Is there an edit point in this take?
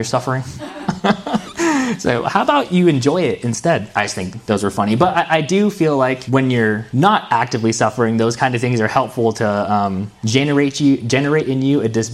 no; 0 cuts

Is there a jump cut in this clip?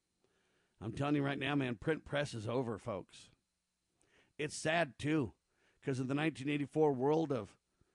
no; 0 cuts

